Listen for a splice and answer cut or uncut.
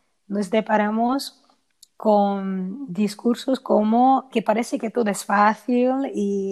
cut